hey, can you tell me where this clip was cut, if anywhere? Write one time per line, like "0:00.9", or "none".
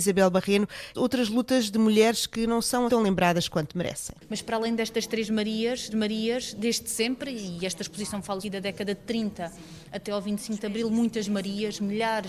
0:00.9
0:02.9
0:05.9
0:08.4

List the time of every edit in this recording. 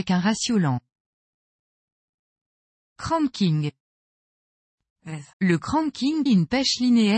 0:05.3
0:06.3

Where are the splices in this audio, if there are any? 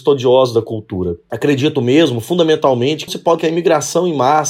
0:03.1
0:03.4

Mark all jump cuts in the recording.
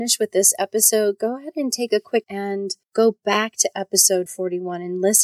0:02.2
0:02.8
0:04.3

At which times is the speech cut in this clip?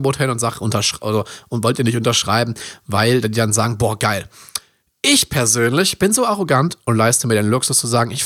none

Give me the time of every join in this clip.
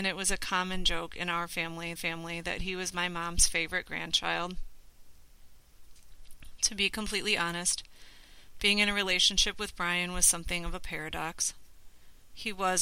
0:02.0

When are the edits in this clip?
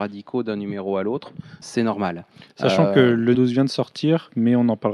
0:01.6
0:03.3

